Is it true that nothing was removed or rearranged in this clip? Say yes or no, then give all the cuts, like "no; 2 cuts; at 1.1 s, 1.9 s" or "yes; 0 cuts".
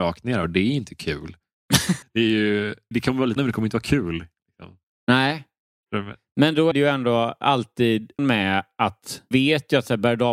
no; 6 cuts; at 2.0 s, 2.9 s, 3.4 s, 6.7 s, 8.2 s, 9.3 s